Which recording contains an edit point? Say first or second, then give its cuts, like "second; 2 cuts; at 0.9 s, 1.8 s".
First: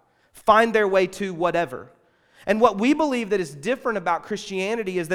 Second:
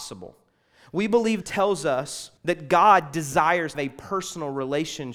second; 3 cuts; at 1.4 s, 2.4 s, 3.7 s